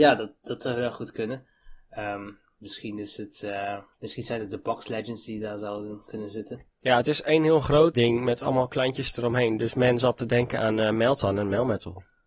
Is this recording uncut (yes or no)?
no